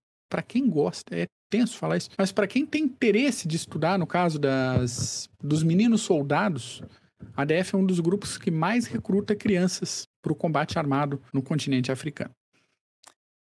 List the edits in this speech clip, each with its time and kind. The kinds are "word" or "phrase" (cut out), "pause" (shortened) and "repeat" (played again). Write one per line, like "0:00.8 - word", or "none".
0:01.4 - pause
0:02.1 - pause
0:05.3 - pause
0:10.1 - pause
0:11.3 - pause